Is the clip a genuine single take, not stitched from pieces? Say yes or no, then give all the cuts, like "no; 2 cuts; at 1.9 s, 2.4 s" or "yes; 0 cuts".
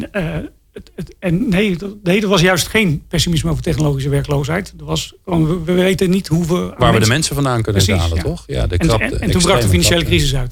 yes; 0 cuts